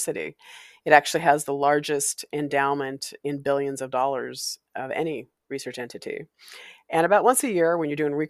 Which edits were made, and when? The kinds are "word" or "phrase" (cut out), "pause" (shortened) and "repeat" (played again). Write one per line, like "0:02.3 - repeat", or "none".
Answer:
none